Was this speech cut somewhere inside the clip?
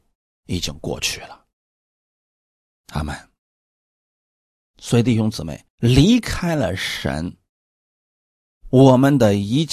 yes; 1 cut; at 5.7 s

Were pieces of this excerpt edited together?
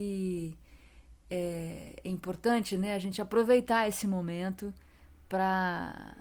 no; 0 cuts

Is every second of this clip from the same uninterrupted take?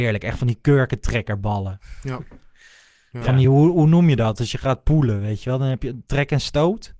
yes; 0 cuts

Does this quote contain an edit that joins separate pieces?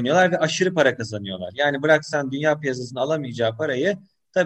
no; 0 cuts

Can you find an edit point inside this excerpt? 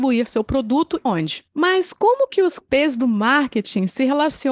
yes; 2 cuts; at 1.1 s, 2.6 s

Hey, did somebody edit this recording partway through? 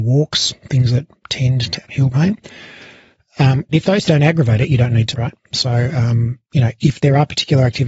yes; 5 cuts; at 1.8 s, 3.7 s, 4.1 s, 5.1 s, 6.4 s

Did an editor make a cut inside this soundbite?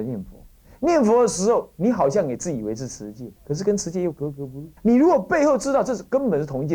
yes; 2 cuts; at 3.4 s, 4.8 s

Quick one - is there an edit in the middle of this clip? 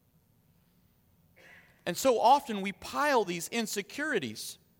no; 0 cuts

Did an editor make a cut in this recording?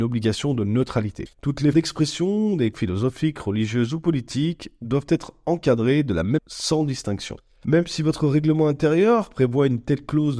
yes; 4 cuts; at 1.3 s, 1.7 s, 2.7 s, 6.4 s

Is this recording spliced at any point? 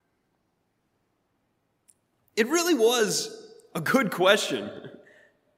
no; 0 cuts

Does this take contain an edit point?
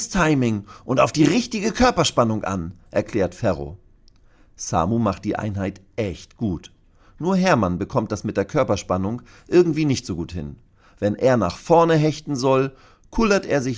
no; 0 cuts

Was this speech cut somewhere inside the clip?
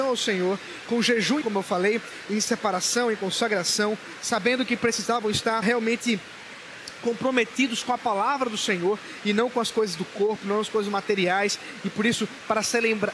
yes; 2 cuts; at 1.4 s, 5.6 s

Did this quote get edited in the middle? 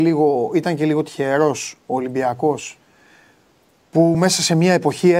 no; 0 cuts

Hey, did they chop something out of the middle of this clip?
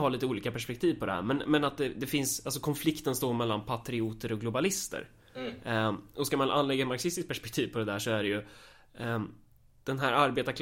no; 0 cuts

